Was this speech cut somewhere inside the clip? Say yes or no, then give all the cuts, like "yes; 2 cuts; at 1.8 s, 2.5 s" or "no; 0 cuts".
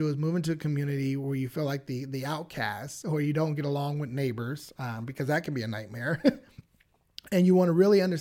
no; 0 cuts